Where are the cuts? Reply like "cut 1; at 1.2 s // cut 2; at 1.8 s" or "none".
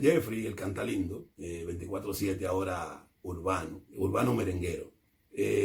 cut 1; at 1.3 s // cut 2; at 3.9 s